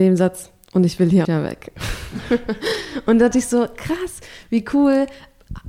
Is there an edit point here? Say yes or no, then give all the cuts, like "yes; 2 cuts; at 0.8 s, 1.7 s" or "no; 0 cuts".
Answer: yes; 2 cuts; at 1.2 s, 3.3 s